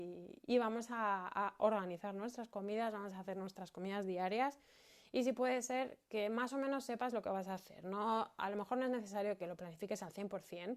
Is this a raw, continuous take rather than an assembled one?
yes; 0 cuts

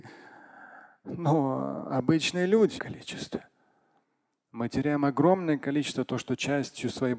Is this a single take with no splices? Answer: no; 1 cut; at 2.8 s

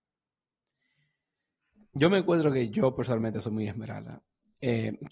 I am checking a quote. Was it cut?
no; 0 cuts

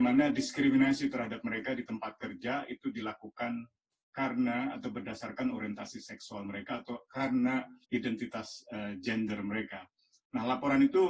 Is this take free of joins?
no; 1 cut; at 7.8 s

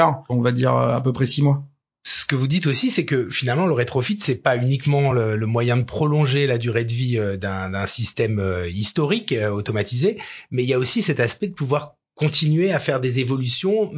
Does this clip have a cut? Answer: no; 0 cuts

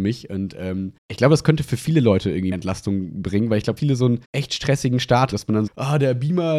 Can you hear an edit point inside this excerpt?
yes; 6 cuts; at 1.0 s, 2.5 s, 3.8 s, 4.2 s, 5.3 s, 5.7 s

